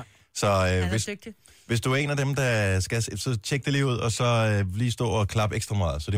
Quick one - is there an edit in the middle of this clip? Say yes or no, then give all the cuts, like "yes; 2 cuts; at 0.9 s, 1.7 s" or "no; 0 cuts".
no; 0 cuts